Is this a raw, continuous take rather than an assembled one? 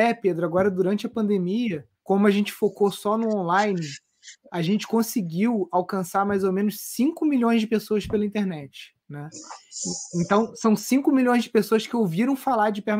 no; 2 cuts; at 2.0 s, 9.0 s

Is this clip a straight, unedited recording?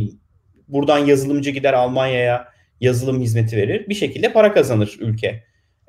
yes; 0 cuts

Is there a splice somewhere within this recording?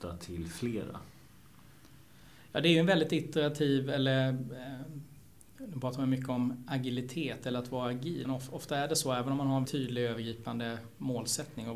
yes; 2 cuts; at 8.2 s, 9.6 s

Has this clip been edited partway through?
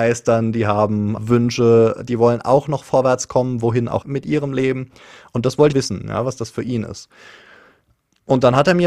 yes; 3 cuts; at 1.2 s, 4.0 s, 5.7 s

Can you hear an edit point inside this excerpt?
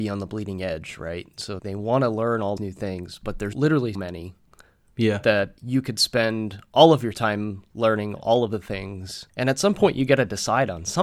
yes; 6 cuts; at 1.6 s, 2.6 s, 3.5 s, 3.9 s, 5.6 s, 9.3 s

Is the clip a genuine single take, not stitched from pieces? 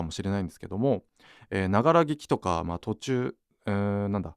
yes; 0 cuts

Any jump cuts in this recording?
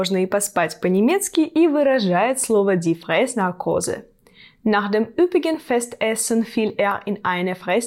no; 0 cuts

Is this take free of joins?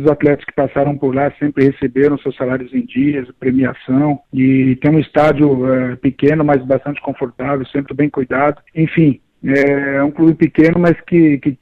no; 3 cuts; at 4.3 s, 7.9 s, 8.7 s

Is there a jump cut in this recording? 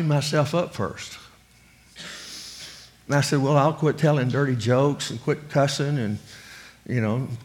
no; 0 cuts

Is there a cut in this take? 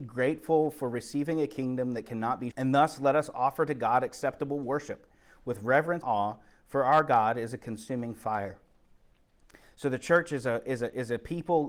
yes; 2 cuts; at 2.5 s, 6.0 s

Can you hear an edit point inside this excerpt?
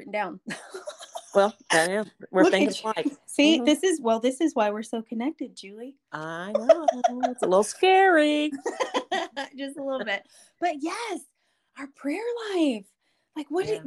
no; 0 cuts

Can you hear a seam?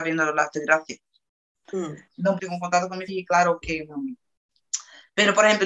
yes; 2 cuts; at 2.4 s, 3.1 s

